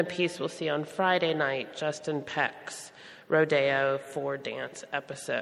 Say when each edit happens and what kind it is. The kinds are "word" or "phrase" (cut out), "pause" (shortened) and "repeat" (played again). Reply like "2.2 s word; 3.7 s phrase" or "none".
none